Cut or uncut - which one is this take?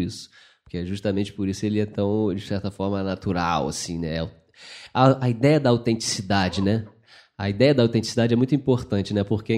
uncut